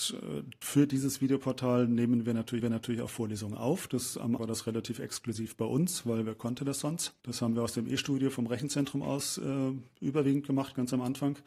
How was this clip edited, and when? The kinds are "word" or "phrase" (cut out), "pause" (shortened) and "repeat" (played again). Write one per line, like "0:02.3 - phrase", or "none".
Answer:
0:02.6 - repeat
0:04.4 - word
0:07.2 - pause